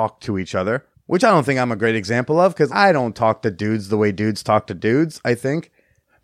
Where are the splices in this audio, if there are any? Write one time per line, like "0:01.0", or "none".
0:00.9
0:02.7